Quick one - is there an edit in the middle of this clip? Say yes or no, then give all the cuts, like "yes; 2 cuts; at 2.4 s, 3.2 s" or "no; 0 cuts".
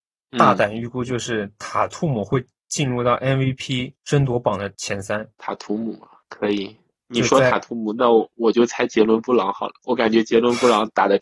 no; 0 cuts